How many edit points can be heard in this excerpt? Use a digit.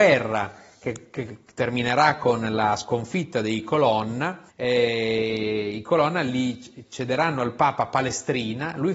1